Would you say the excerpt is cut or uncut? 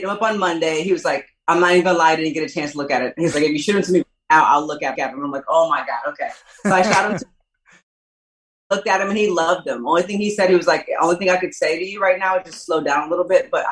cut